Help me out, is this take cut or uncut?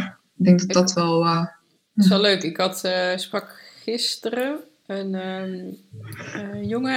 uncut